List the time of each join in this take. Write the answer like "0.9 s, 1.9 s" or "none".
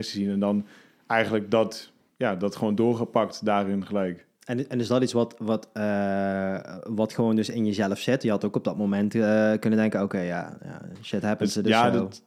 none